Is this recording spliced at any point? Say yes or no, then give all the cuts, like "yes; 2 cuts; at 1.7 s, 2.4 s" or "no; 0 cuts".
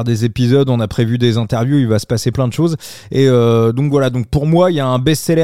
yes; 1 cut; at 2.3 s